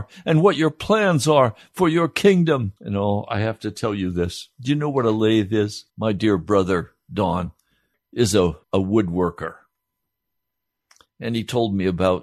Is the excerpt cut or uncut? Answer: cut